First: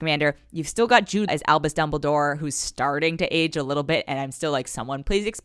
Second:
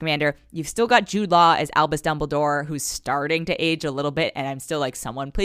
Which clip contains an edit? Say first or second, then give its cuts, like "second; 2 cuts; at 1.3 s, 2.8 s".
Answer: first; 1 cut; at 1.3 s